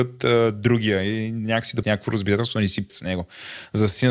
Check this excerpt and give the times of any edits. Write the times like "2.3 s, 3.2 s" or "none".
1.8 s, 2.9 s

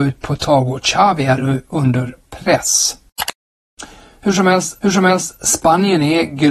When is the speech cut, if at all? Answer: 4.8 s

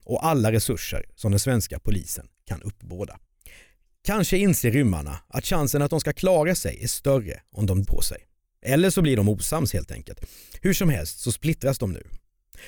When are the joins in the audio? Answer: 7.8 s

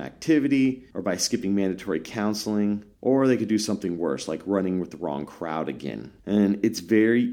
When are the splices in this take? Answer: 0.9 s, 2.9 s, 6.2 s

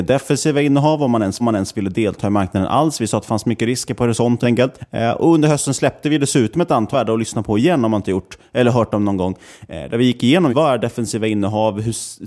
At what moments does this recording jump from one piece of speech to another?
1.4 s, 4.4 s, 6.9 s, 10.5 s

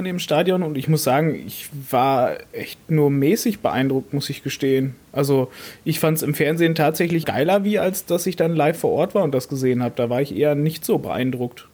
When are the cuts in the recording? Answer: 7.2 s

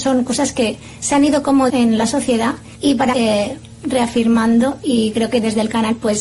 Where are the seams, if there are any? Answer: 1.7 s, 2.7 s, 3.1 s

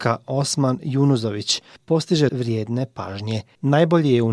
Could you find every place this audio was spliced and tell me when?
2.3 s

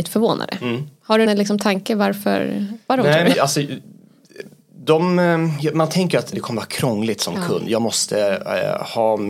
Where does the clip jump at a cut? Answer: 1.3 s, 2.9 s, 3.3 s, 6.3 s

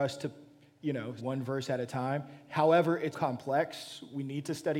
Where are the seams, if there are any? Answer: 1.2 s, 3.1 s

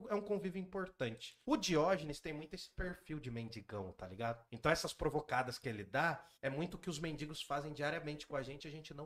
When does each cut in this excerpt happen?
1.4 s, 4.5 s, 6.3 s

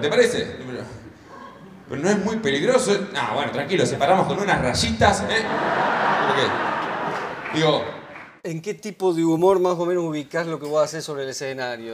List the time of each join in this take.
8.4 s

